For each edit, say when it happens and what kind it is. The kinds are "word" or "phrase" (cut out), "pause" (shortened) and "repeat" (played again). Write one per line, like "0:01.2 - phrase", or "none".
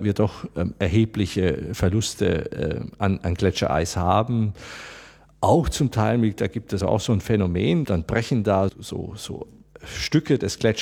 0:06.8 - word
0:07.8 - word
0:08.7 - word

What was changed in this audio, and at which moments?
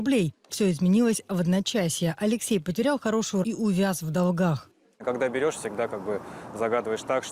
0:03.4 - word

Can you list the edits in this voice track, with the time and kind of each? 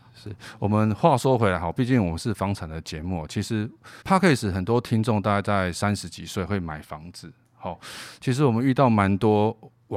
0:04.0 - pause

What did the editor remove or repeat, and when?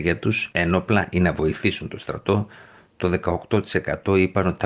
none

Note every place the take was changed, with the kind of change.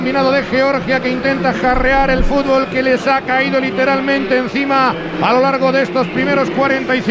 none

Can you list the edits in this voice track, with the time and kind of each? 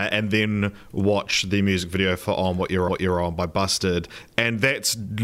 0:02.9 - repeat

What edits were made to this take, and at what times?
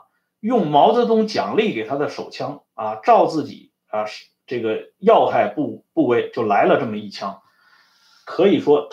none

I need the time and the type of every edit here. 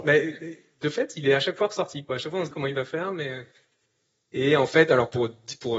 0:02.5 - word

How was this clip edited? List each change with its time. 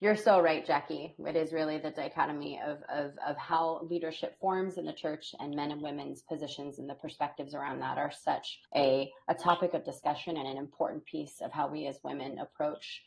0:08.6 - pause

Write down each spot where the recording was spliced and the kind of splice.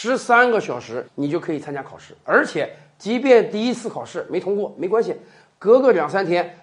0:01.1 - pause

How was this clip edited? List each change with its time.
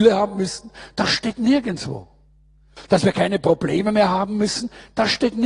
none

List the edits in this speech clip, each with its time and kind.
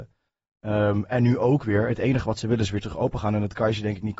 none

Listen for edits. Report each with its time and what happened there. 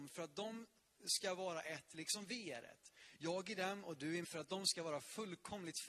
0:04.2 - word

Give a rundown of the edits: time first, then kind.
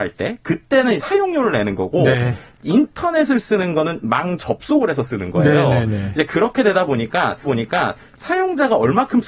0:01.0 - word
0:07.4 - repeat

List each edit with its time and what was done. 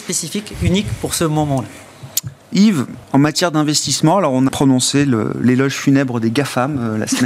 0:03.0 - pause
0:04.5 - word

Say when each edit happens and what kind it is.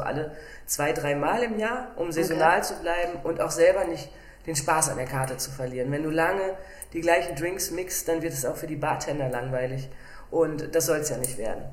none

